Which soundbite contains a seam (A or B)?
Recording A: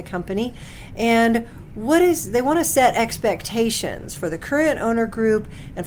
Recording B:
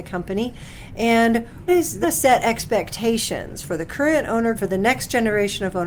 B